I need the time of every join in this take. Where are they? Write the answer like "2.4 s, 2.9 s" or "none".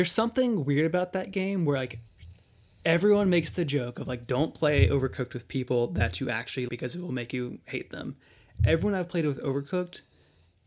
6.7 s